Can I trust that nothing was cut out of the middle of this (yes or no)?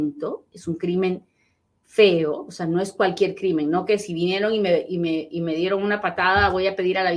yes